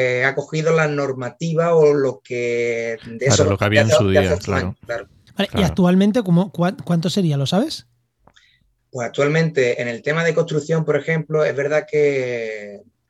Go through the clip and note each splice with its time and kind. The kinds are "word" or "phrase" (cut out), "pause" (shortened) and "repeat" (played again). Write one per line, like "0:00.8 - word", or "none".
none